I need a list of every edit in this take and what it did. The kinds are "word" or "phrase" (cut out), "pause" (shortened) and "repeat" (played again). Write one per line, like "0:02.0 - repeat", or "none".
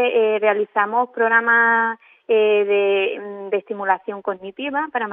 none